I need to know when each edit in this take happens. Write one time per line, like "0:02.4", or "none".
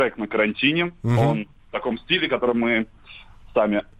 none